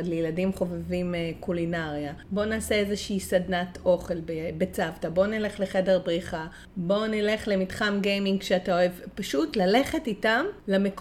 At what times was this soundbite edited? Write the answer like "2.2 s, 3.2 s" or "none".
none